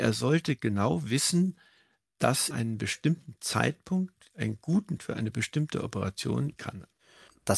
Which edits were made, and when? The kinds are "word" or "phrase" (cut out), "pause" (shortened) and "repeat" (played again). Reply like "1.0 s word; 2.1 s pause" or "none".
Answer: 2.5 s word; 5.0 s word; 6.6 s word